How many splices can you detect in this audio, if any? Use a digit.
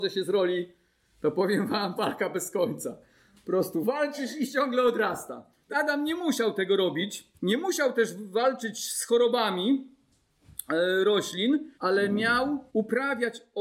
5